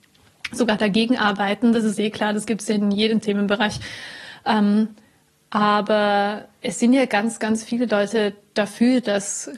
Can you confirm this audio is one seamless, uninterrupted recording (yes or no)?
yes